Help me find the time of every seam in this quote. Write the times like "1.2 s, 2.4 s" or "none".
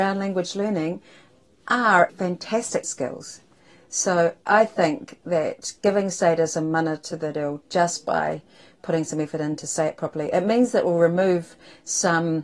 2.1 s, 2.8 s

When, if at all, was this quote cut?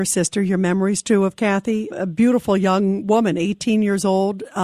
1.9 s

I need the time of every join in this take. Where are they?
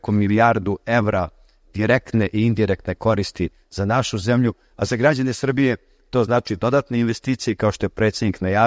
none

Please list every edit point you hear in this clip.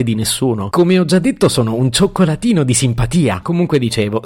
none

